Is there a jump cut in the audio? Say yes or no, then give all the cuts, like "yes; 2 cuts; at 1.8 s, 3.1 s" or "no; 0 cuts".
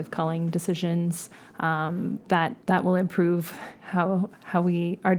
yes; 1 cut; at 2.6 s